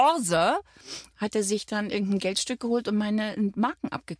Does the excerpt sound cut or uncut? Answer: uncut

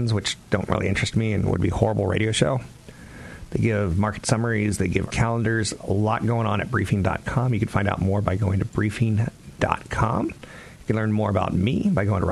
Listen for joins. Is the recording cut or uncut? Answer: cut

